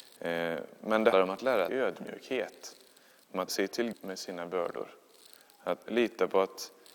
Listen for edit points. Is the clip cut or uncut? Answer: cut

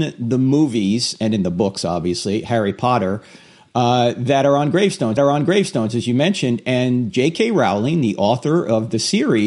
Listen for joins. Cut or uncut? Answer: cut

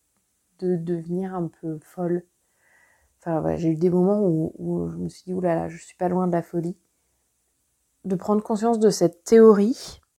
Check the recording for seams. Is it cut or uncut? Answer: uncut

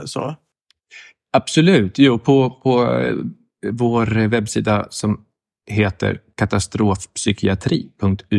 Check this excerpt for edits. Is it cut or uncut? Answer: uncut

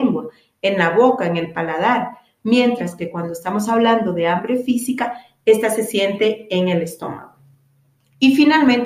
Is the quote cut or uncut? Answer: uncut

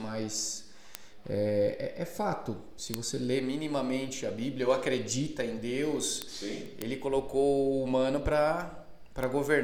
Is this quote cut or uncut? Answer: uncut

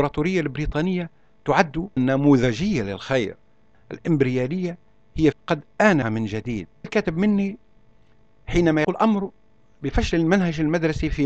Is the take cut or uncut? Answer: cut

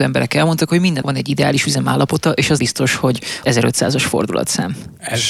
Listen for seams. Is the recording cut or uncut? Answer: cut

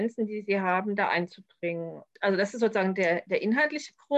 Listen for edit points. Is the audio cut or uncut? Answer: uncut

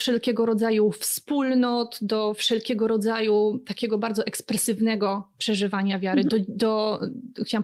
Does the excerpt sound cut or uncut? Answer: uncut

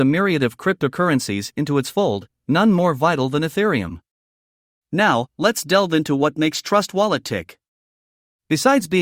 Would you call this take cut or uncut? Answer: uncut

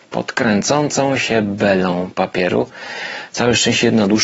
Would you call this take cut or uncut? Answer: uncut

